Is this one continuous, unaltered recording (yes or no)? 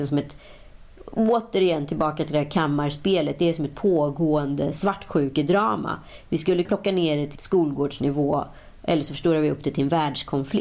no